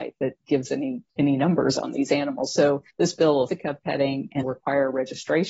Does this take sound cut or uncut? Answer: cut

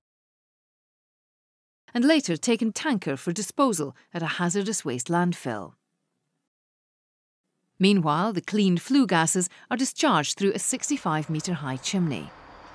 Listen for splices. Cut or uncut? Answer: cut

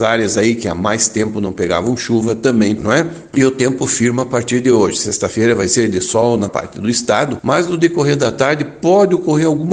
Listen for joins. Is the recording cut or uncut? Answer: cut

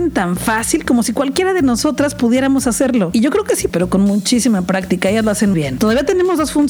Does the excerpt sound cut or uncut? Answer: cut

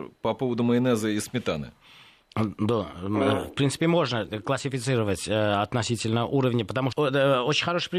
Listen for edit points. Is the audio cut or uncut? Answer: cut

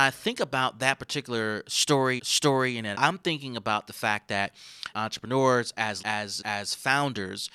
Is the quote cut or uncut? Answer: cut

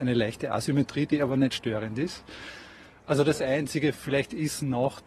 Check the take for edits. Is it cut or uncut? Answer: uncut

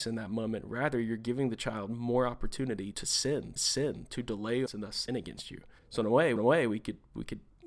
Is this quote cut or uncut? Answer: cut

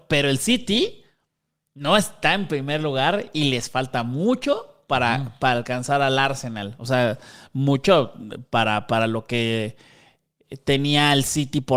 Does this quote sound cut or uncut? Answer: uncut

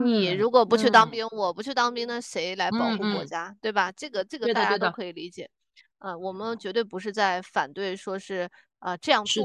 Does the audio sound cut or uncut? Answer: uncut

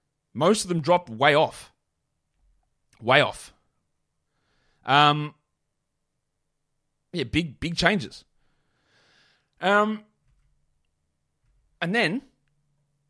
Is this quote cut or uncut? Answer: uncut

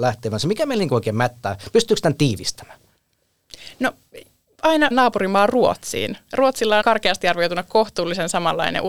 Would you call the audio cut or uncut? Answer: cut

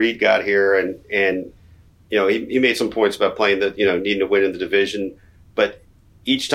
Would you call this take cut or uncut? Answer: uncut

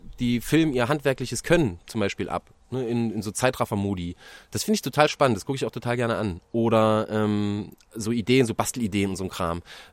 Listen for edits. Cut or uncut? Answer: uncut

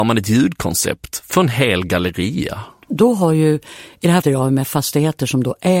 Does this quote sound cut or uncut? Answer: cut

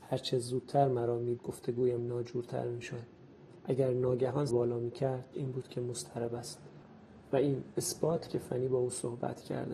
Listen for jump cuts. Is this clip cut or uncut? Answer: cut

